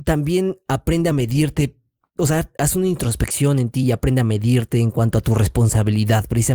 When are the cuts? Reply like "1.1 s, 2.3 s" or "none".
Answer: none